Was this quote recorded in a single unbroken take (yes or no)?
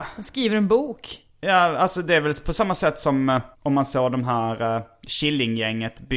no